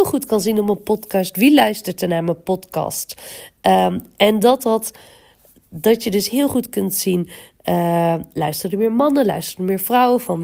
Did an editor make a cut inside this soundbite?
no; 0 cuts

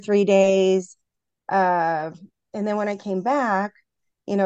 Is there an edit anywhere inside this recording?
no; 0 cuts

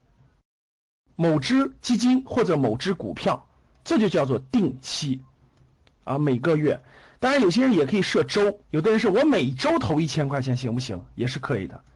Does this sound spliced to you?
yes; 1 cut; at 8.6 s

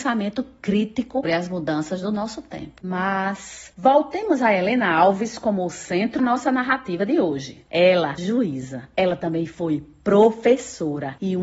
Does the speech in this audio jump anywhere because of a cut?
yes; 3 cuts; at 1.2 s, 6.2 s, 8.2 s

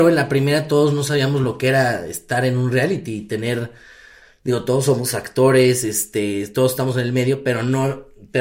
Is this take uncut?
yes; 0 cuts

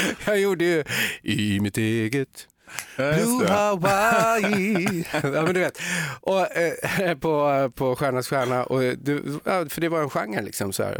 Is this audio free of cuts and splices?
yes; 0 cuts

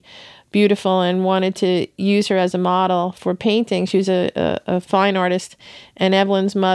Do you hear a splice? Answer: no; 0 cuts

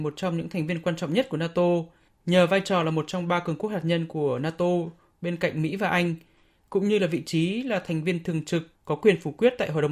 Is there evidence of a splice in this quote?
no; 0 cuts

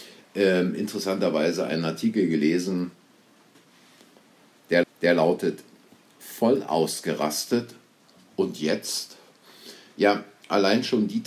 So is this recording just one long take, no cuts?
no; 1 cut; at 4.8 s

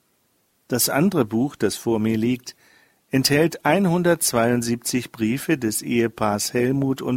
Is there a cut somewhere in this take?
no; 0 cuts

